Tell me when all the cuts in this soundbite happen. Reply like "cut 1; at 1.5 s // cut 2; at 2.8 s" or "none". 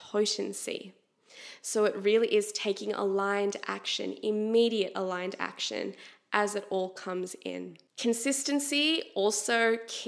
cut 1; at 7.9 s